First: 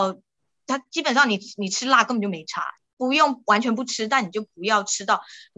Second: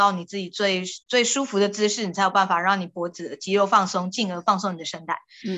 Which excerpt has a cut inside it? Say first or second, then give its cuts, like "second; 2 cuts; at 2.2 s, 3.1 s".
second; 1 cut; at 1.0 s